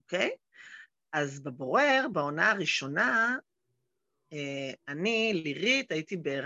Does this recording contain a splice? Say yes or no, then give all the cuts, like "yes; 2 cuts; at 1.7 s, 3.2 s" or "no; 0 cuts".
no; 0 cuts